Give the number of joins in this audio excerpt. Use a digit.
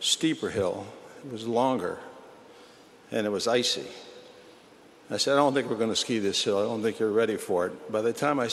0